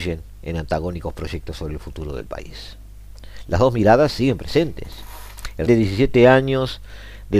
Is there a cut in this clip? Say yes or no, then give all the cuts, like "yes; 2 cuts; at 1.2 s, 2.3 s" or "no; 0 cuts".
yes; 1 cut; at 5.7 s